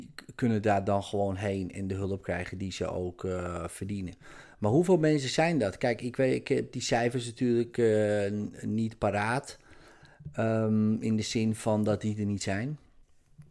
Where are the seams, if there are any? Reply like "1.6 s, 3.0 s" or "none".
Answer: none